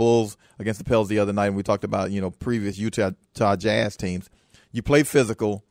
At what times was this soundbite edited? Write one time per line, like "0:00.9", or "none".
none